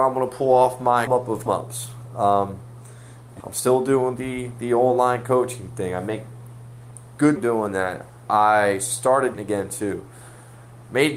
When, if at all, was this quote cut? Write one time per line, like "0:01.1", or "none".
0:01.1
0:01.5
0:03.4
0:07.4
0:09.3